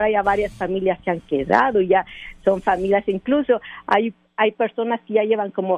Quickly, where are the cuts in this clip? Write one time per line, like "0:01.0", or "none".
none